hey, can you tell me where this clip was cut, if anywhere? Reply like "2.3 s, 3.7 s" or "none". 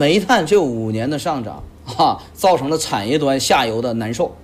1.7 s

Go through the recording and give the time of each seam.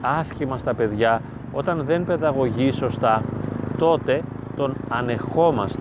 none

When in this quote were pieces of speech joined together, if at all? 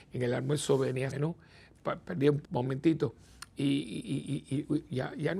1.1 s, 2.4 s

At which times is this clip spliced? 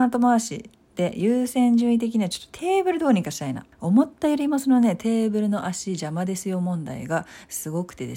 3.7 s

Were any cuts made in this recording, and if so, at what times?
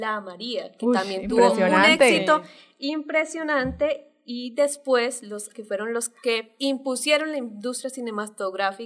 5.5 s, 6.2 s

